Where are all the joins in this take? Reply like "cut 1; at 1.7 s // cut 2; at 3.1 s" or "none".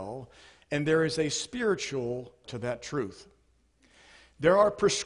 cut 1; at 2.4 s